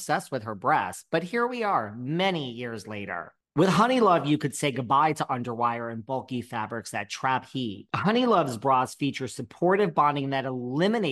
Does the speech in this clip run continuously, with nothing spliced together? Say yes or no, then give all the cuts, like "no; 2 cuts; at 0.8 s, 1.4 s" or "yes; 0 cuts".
yes; 0 cuts